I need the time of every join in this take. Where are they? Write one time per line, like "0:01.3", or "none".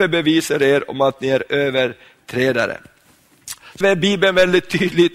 0:03.8